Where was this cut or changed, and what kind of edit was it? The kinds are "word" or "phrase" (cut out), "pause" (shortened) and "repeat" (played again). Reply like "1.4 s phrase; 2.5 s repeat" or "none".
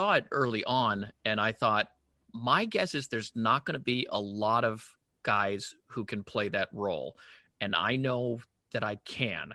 none